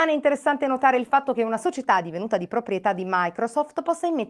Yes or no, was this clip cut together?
no